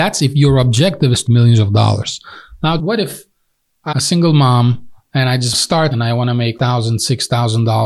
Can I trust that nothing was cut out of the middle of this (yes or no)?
no